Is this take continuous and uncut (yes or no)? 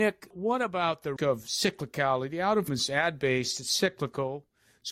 no